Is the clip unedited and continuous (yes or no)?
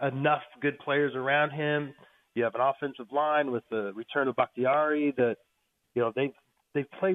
yes